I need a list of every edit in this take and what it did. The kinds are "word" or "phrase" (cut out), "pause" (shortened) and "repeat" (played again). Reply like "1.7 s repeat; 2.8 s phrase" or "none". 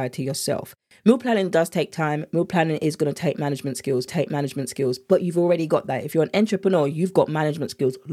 4.1 s repeat